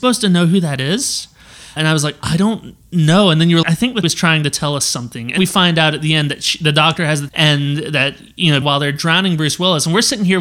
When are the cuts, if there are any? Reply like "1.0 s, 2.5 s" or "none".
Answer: 1.8 s, 3.6 s, 4.0 s, 5.4 s, 7.3 s, 8.6 s

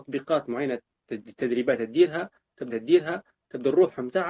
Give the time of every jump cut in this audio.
2.7 s

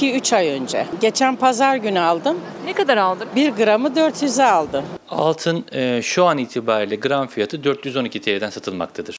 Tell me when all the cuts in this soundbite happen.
none

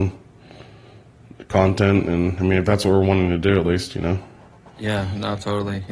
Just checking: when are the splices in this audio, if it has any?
none

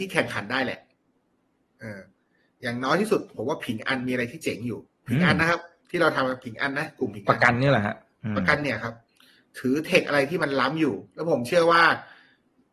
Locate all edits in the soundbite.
4.9 s

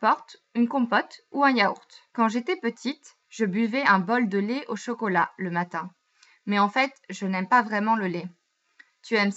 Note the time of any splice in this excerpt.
2.1 s, 3.2 s

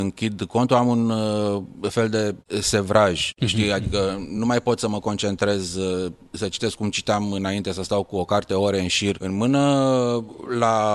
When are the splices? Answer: none

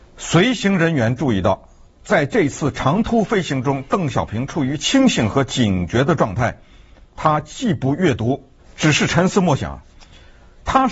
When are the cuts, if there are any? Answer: 8.6 s

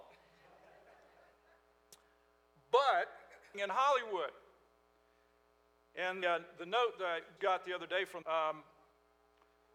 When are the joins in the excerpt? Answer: 3.5 s, 6.2 s, 7.4 s, 8.2 s

